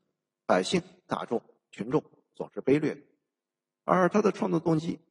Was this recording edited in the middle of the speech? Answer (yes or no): no